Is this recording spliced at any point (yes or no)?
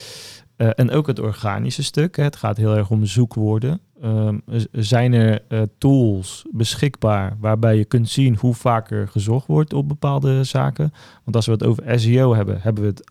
no